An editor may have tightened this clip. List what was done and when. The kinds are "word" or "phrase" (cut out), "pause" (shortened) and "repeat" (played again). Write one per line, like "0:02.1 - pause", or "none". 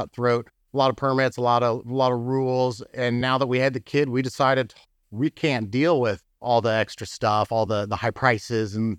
none